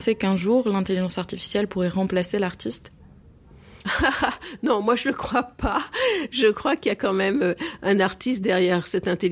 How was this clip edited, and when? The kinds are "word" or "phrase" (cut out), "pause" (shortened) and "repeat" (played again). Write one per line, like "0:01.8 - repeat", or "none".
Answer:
none